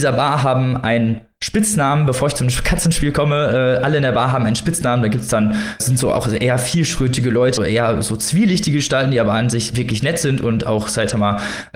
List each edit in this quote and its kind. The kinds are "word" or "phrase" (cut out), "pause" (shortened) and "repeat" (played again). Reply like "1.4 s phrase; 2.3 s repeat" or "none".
5.8 s word; 7.6 s word